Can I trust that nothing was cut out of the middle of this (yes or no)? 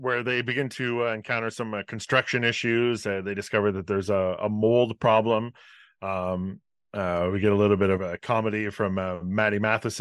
yes